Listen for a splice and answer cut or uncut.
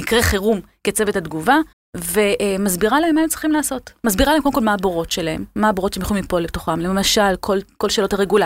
cut